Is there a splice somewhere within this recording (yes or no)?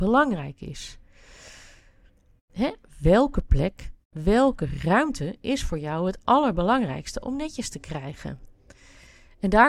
no